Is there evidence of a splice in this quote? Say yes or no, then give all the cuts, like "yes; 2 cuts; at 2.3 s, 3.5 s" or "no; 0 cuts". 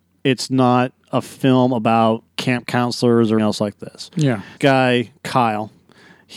yes; 3 cuts; at 2.3 s, 3.4 s, 4.6 s